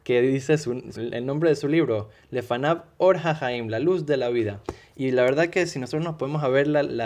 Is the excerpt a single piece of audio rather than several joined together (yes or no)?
no